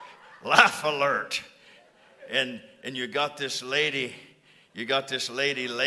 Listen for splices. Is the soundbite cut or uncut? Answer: uncut